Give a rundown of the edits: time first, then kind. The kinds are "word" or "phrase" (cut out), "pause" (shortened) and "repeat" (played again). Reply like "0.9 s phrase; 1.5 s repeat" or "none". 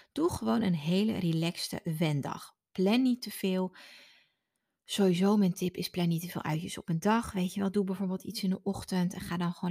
none